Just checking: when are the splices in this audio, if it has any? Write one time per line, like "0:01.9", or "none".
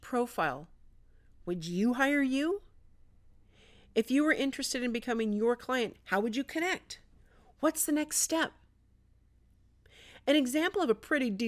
none